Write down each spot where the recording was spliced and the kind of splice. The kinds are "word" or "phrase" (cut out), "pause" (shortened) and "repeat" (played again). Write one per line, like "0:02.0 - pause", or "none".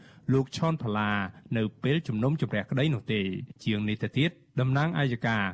0:03.6 - pause